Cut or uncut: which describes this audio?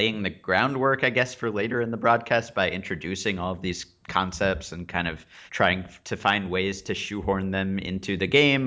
cut